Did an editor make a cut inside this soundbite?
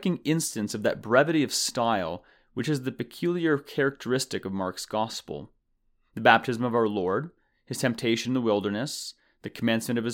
no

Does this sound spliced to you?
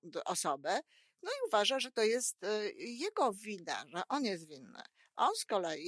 no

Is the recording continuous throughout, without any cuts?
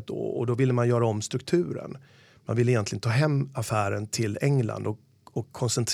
yes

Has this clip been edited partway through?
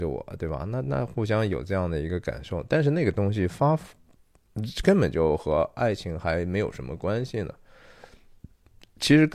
no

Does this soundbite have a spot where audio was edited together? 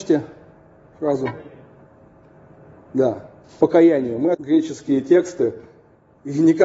yes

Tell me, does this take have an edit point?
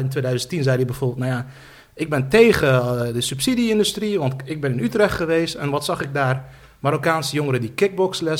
no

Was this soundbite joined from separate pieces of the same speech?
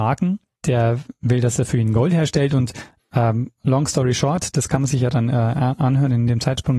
no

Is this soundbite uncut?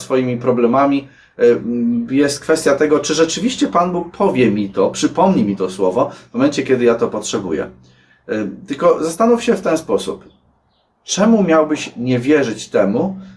yes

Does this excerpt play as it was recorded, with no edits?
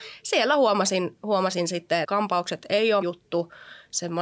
no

